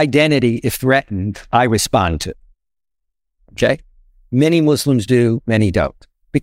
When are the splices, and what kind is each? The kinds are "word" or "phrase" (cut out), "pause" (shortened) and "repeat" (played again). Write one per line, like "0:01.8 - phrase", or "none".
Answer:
none